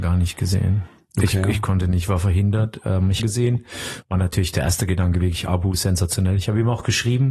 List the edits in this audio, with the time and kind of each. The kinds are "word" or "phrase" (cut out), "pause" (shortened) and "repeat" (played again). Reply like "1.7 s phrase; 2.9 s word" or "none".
3.2 s phrase